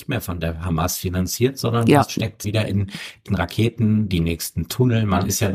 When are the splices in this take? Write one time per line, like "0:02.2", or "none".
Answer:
0:02.4
0:03.3